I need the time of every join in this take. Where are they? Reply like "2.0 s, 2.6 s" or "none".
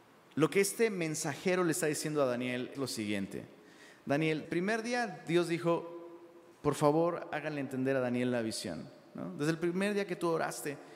2.7 s, 4.4 s, 6.5 s